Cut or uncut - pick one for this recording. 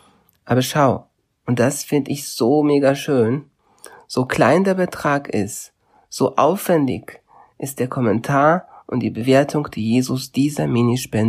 uncut